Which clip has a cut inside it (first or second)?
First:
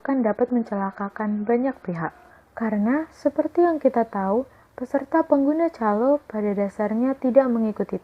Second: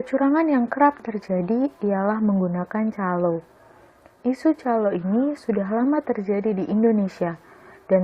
first